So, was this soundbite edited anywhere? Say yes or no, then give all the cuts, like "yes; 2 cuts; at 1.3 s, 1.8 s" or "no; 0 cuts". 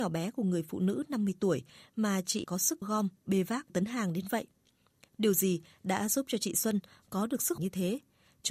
yes; 4 cuts; at 2.4 s, 2.8 s, 3.7 s, 7.6 s